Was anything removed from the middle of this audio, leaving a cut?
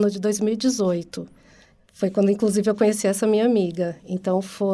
no; 0 cuts

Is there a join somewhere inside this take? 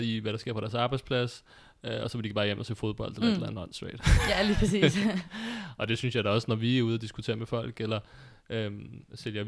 no; 0 cuts

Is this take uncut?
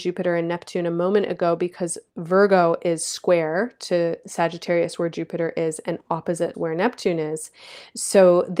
no; 3 cuts; at 2.1 s, 4.2 s, 6.5 s

